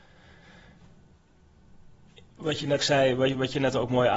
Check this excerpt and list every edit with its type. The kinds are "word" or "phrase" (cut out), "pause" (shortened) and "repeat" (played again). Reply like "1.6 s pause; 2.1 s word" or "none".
2.8 s word